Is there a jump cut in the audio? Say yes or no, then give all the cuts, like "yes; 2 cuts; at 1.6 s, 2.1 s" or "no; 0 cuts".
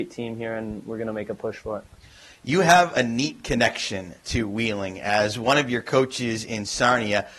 no; 0 cuts